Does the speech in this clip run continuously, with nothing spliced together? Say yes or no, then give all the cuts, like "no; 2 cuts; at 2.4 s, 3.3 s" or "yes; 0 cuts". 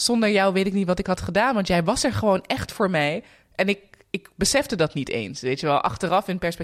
yes; 0 cuts